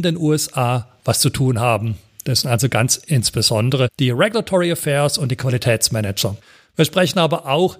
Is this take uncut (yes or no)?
yes